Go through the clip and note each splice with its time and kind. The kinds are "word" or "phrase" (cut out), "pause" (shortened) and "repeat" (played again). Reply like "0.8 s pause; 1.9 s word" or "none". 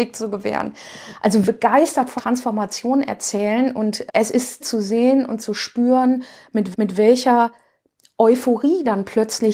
1.4 s word; 2.2 s word; 4.1 s word; 4.6 s word; 6.7 s repeat